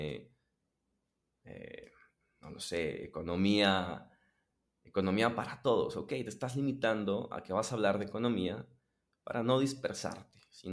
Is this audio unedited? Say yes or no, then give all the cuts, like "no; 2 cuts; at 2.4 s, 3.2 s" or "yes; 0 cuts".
yes; 0 cuts